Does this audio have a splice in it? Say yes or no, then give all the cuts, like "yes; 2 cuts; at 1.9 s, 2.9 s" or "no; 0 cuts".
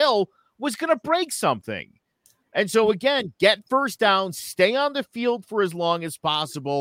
no; 0 cuts